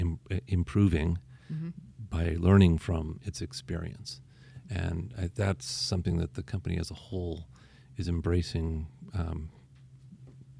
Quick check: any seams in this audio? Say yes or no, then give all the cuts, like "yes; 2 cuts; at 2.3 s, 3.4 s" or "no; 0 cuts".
no; 0 cuts